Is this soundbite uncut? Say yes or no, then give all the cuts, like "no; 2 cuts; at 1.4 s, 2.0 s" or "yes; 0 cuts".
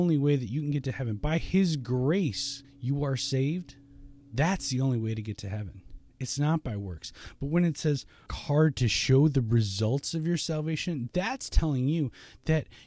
no; 3 cuts; at 2.6 s, 4.2 s, 8.3 s